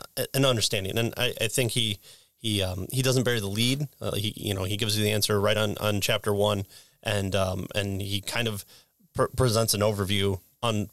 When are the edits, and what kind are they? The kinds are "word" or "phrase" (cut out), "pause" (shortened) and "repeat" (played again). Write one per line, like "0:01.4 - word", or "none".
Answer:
none

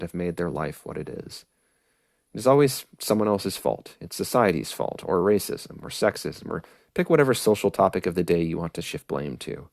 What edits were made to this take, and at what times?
none

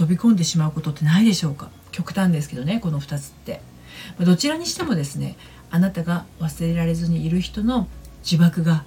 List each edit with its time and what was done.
0:01.8 - pause

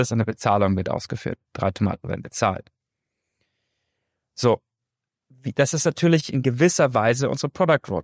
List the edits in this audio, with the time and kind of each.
none

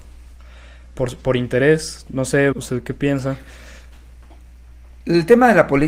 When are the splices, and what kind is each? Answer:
0:02.5 - word

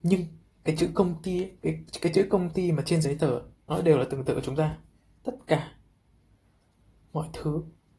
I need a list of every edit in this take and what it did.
none

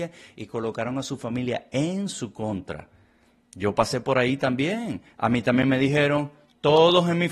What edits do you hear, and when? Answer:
none

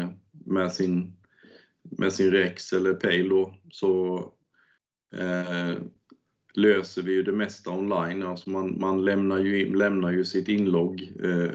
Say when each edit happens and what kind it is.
none

